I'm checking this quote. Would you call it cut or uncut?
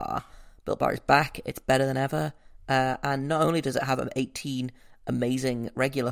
uncut